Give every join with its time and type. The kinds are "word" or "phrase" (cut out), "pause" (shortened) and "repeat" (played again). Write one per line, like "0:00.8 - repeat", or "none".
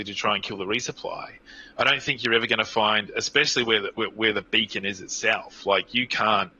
none